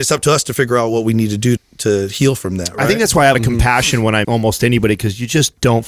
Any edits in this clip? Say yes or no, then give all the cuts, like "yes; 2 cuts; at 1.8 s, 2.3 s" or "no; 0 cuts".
yes; 3 cuts; at 1.6 s, 3.3 s, 4.2 s